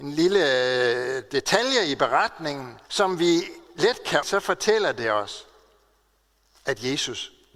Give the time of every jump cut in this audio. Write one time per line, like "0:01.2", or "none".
0:02.8
0:04.2